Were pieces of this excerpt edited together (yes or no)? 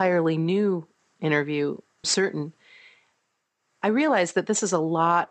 yes